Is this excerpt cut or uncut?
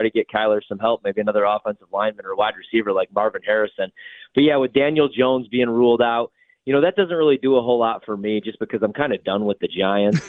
uncut